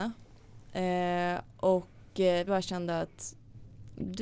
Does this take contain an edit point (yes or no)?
yes